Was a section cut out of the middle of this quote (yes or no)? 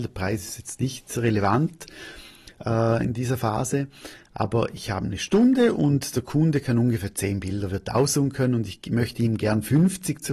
no